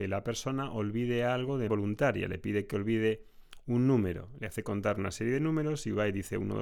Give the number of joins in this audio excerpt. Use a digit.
1